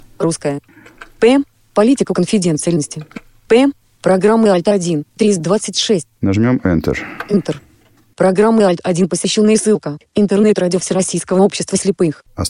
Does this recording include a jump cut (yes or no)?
no